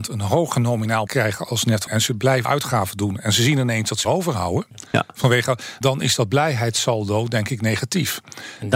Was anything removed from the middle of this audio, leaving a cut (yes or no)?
yes